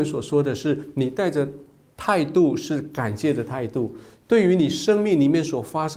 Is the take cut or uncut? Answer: uncut